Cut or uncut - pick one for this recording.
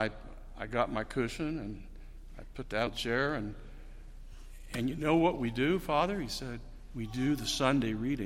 cut